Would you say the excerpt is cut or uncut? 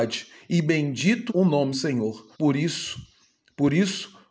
cut